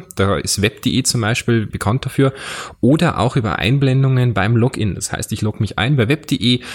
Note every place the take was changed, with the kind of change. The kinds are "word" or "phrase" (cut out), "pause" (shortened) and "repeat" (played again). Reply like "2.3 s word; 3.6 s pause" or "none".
1.7 s word